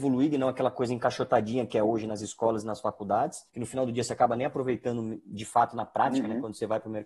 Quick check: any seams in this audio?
yes; 1 cut; at 3.5 s

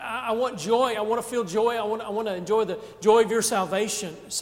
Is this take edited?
no; 0 cuts

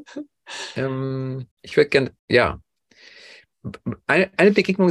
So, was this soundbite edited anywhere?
yes; 2 cuts; at 1.5 s, 2.2 s

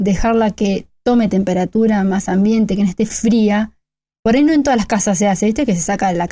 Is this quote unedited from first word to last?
yes; 0 cuts

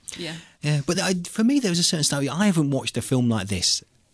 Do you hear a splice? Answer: no; 0 cuts

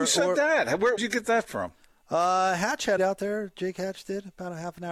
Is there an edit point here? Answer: yes; 2 cuts; at 1.0 s, 3.0 s

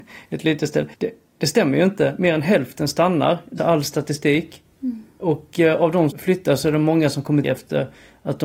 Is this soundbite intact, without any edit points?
no; 4 cuts; at 0.9 s, 3.6 s, 6.1 s, 7.4 s

